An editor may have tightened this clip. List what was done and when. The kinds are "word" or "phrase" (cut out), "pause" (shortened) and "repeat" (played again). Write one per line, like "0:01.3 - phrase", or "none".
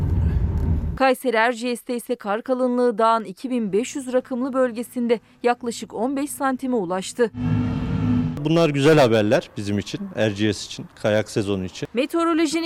none